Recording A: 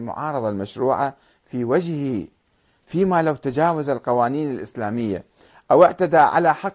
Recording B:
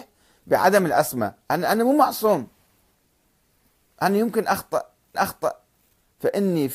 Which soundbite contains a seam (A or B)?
B